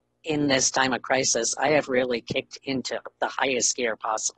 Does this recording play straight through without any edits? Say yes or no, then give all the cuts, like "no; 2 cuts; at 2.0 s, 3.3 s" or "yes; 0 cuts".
yes; 0 cuts